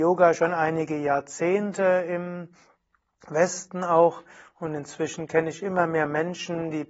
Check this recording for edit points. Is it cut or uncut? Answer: uncut